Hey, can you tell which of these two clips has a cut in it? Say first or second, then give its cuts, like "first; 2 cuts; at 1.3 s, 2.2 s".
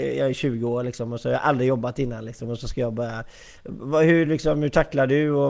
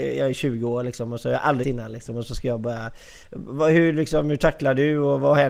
second; 1 cut; at 1.6 s